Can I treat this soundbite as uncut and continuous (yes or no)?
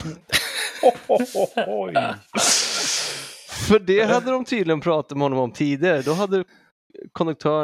yes